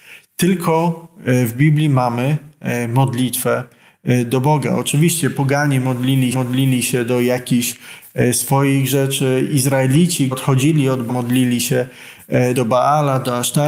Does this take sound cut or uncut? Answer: cut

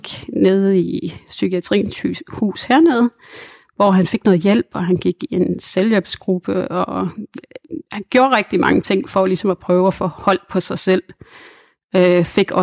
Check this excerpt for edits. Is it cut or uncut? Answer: uncut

